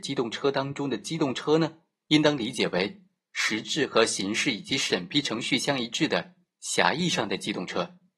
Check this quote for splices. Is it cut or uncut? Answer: uncut